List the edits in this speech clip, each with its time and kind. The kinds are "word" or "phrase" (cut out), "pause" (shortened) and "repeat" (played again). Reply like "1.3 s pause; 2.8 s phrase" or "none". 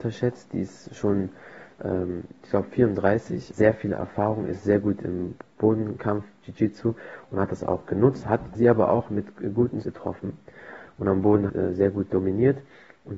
3.5 s phrase; 8.6 s word; 9.8 s word; 11.5 s word